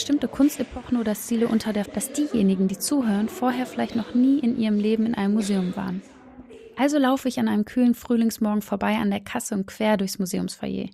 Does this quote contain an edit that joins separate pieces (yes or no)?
yes